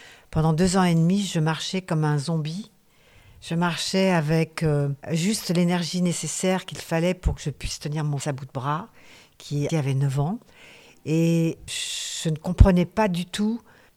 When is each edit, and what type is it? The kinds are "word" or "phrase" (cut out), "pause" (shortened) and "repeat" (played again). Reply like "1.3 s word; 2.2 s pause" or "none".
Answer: 5.0 s pause; 8.2 s word; 9.7 s word; 11.7 s word